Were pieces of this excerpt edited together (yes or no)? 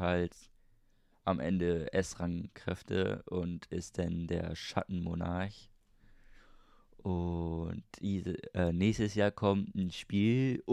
no